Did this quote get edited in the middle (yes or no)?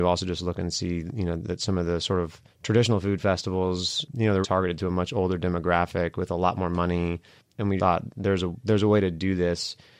yes